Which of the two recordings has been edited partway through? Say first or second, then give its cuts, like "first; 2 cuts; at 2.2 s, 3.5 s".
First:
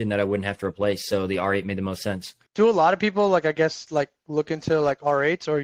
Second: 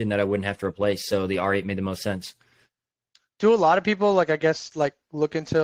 first; 1 cut; at 2.5 s